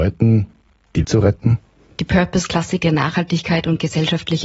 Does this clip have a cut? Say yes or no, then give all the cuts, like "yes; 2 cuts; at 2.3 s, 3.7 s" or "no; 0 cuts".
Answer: yes; 2 cuts; at 1.0 s, 2.8 s